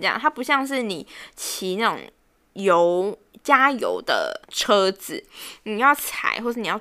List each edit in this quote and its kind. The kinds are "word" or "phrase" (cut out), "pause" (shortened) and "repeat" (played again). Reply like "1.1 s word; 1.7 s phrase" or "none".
4.4 s pause